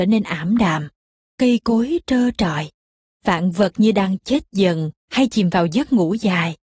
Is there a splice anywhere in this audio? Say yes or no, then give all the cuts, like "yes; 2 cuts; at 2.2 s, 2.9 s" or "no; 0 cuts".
yes; 1 cut; at 5.0 s